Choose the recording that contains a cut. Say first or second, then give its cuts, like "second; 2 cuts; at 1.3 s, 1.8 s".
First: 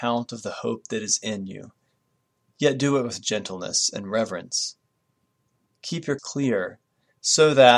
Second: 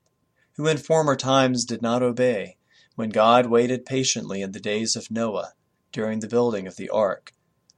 first; 1 cut; at 6.2 s